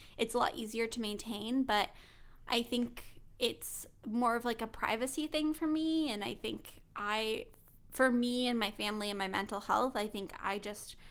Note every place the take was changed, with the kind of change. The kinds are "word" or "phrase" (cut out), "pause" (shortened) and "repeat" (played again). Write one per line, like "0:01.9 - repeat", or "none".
none